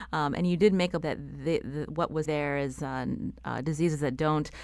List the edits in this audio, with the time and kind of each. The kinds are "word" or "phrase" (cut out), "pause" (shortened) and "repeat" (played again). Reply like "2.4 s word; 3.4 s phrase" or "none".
1.0 s word; 2.2 s word